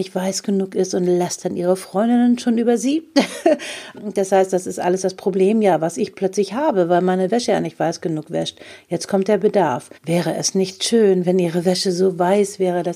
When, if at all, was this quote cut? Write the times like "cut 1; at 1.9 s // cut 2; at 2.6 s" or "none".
cut 1; at 3.9 s // cut 2; at 9.9 s